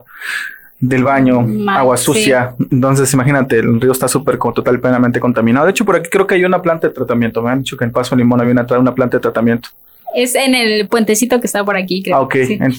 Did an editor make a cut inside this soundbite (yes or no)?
no